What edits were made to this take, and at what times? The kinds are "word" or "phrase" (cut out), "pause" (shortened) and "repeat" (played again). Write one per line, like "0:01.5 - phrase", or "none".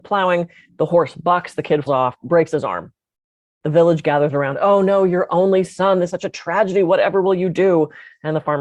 0:01.9 - word
0:06.1 - word

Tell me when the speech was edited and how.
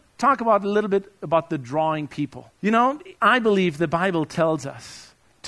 0:02.6 - pause
0:03.2 - pause

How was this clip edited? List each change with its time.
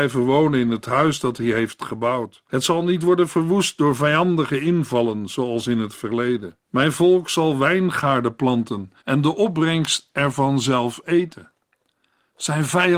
0:02.4 - pause
0:06.6 - pause
0:09.0 - pause

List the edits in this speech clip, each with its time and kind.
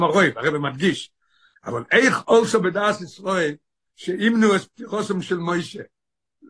none

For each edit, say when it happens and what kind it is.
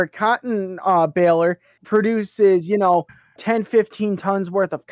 0:01.8 - word
0:03.4 - word

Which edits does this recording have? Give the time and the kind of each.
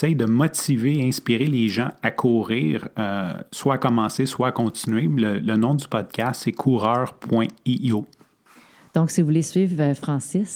none

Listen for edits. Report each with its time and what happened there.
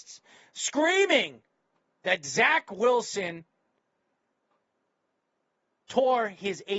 none

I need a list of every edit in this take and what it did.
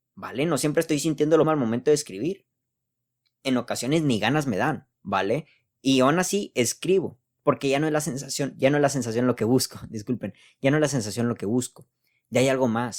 0:01.4 - word
0:04.9 - pause

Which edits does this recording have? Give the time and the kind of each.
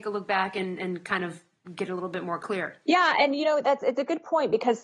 none

